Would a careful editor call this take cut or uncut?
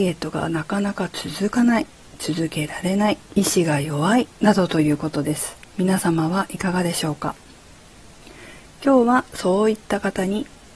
cut